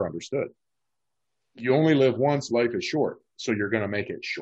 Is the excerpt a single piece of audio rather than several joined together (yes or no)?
no